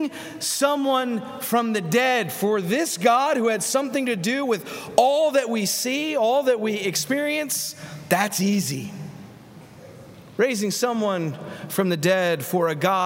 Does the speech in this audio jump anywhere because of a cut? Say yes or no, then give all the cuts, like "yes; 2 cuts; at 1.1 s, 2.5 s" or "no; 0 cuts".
no; 0 cuts